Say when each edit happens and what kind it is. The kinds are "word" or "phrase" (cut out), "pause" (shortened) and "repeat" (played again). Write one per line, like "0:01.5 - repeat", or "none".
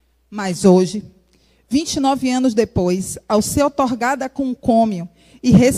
none